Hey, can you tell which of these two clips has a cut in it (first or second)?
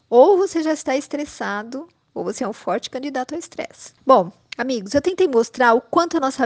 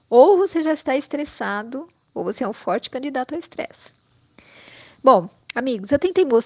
first